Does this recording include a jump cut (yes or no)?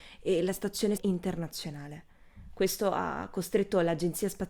yes